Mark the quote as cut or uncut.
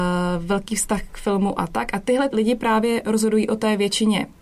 cut